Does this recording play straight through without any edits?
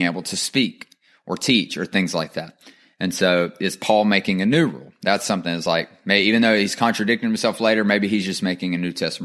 yes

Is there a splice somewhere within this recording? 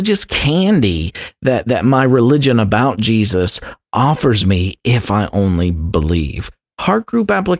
no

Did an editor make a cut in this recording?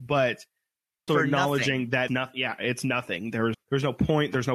yes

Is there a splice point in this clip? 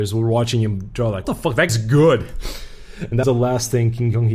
yes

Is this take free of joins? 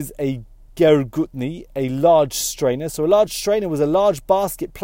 yes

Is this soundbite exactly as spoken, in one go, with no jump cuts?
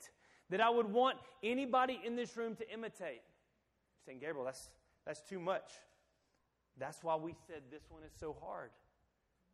yes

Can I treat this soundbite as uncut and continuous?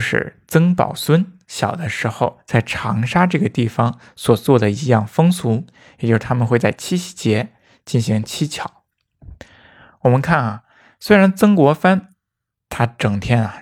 yes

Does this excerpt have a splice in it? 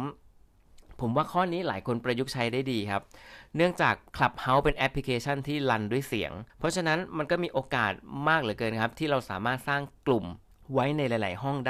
yes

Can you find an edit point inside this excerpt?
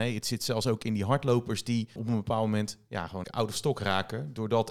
yes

